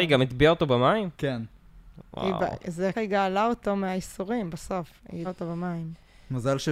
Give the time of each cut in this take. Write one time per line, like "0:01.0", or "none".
0:01.1
0:02.9
0:05.2